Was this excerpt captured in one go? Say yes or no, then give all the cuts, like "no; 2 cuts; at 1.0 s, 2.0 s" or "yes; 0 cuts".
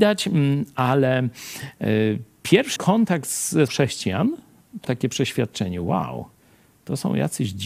no; 3 cuts; at 2.8 s, 3.7 s, 4.8 s